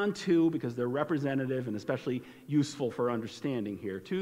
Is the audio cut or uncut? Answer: uncut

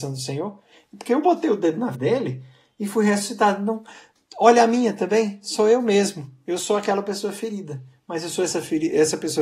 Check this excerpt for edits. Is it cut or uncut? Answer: cut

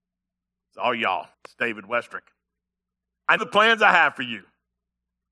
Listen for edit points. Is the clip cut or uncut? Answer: cut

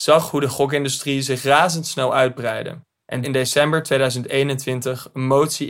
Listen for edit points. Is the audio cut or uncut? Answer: cut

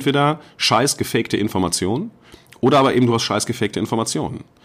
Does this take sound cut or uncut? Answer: uncut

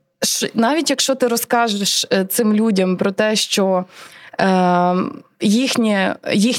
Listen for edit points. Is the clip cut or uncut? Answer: uncut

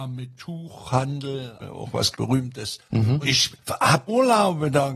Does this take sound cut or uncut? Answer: cut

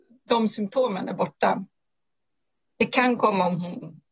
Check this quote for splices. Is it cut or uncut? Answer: uncut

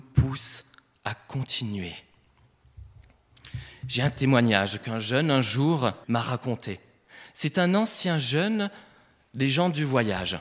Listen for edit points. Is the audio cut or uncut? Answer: cut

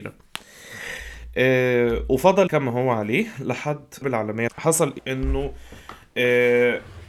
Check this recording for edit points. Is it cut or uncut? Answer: cut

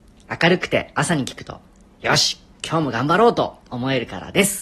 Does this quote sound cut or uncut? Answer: uncut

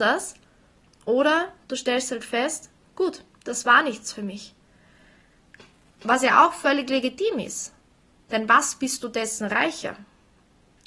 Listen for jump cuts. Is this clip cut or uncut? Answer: uncut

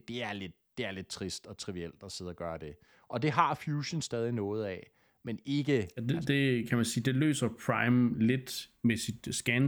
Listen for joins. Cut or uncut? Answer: uncut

